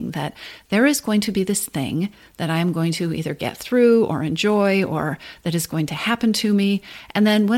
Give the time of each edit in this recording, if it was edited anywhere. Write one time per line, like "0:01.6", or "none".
none